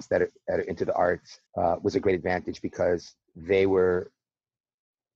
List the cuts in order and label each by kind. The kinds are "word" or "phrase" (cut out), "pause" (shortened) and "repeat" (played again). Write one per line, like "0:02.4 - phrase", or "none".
0:01.5 - pause
0:03.2 - pause